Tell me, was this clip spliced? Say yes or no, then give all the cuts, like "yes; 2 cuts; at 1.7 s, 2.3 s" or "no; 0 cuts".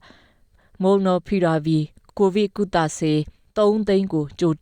no; 0 cuts